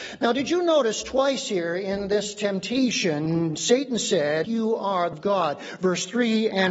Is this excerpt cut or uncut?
cut